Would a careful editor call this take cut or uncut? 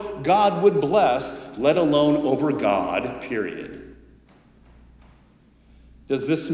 uncut